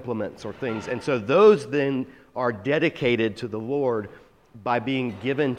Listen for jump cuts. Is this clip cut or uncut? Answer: uncut